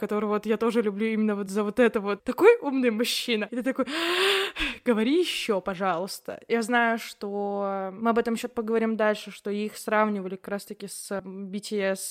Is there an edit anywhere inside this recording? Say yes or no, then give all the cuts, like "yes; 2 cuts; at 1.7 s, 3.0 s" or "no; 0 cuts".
no; 0 cuts